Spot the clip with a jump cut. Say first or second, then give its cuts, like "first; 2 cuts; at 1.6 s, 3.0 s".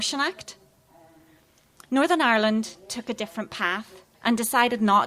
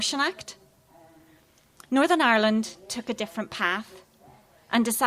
first; 1 cut; at 4.1 s